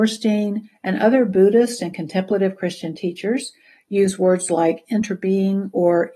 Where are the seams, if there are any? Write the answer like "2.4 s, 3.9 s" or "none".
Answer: none